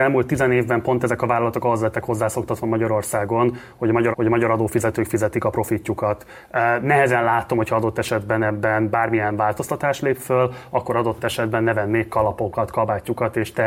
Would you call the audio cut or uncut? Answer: cut